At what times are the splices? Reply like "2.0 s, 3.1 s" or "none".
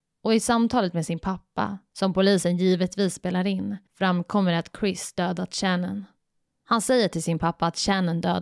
3.9 s